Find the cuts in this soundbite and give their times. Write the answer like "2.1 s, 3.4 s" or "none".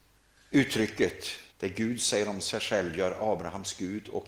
1.5 s